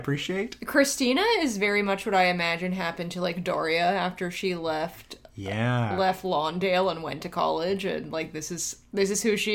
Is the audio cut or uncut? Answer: uncut